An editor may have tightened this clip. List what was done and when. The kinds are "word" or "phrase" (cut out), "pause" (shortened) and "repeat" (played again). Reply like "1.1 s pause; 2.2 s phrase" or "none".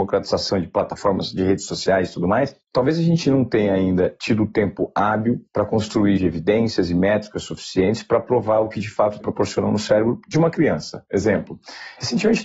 6.2 s phrase; 9.2 s word